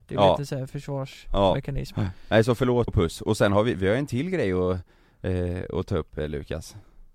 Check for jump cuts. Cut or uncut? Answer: cut